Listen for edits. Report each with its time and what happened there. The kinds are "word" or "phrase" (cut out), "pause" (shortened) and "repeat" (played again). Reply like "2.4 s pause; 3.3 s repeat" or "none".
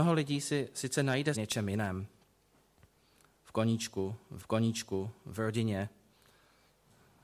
1.3 s word; 4.4 s repeat